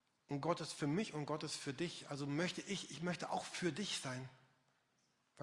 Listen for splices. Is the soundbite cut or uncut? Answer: uncut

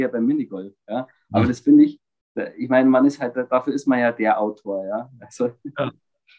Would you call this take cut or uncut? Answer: uncut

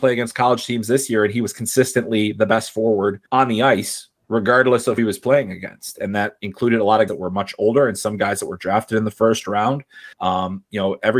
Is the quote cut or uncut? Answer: cut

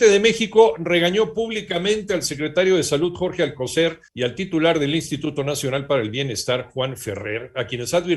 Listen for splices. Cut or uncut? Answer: cut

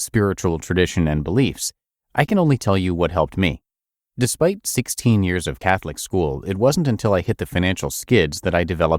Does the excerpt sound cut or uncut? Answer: uncut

